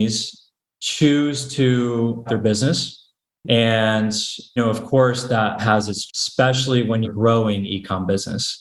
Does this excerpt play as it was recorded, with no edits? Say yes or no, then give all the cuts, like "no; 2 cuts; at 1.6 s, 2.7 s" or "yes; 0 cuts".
no; 5 cuts; at 2.3 s, 4.6 s, 5.6 s, 6.1 s, 7.0 s